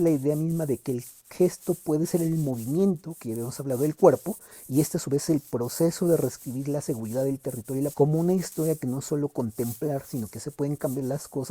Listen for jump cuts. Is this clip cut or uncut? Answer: cut